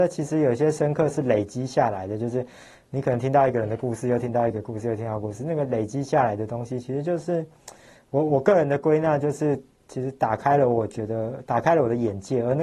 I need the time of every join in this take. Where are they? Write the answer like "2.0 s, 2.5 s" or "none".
none